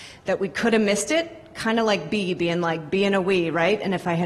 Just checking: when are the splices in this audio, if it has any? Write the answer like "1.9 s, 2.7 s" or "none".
none